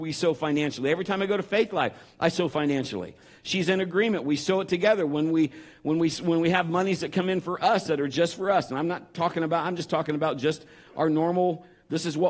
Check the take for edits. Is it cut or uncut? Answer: uncut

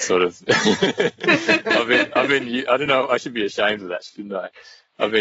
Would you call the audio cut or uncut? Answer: uncut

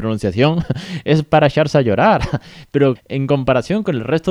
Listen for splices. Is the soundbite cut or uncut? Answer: cut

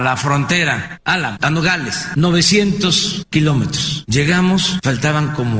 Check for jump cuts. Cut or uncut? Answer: uncut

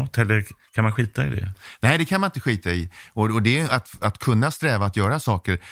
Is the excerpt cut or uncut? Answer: uncut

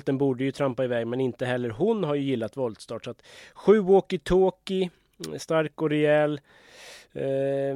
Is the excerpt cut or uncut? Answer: uncut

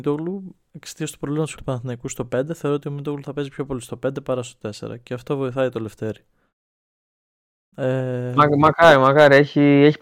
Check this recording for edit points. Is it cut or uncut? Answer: cut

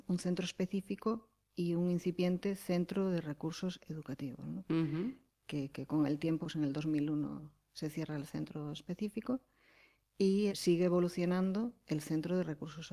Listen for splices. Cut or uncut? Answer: cut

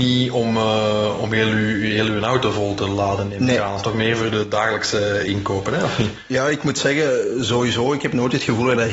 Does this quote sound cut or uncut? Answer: uncut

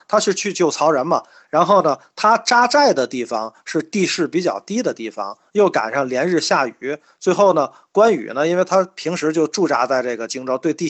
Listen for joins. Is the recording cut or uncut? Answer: uncut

